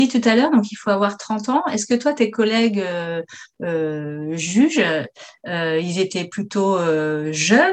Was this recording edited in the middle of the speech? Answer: no; 0 cuts

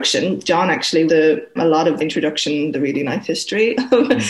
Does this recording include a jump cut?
yes; 4 cuts; at 1.1 s, 1.6 s, 2.0 s, 2.7 s

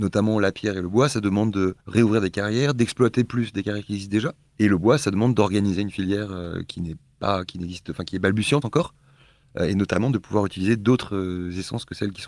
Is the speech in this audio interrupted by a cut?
yes; 2 cuts; at 1.8 s, 8.6 s

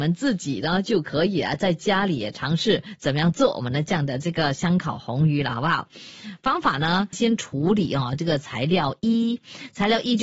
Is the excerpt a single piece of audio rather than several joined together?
no; 1 cut; at 7.1 s

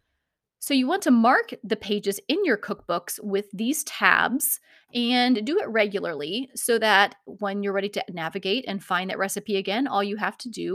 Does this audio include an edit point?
no; 0 cuts

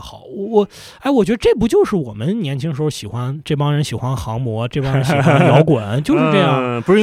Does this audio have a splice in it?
no; 0 cuts

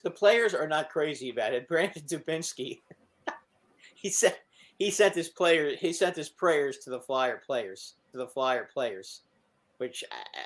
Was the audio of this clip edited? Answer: yes; 2 cuts; at 3.0 s, 8.1 s

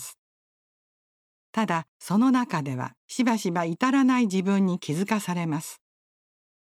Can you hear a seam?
yes; 2 cuts; at 1.9 s, 3.0 s

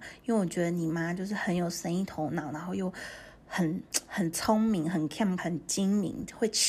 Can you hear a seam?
yes; 1 cut; at 5.4 s

